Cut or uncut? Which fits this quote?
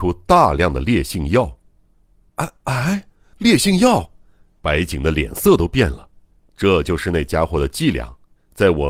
cut